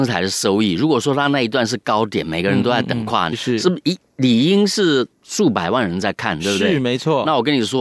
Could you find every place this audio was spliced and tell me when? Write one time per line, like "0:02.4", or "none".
0:03.3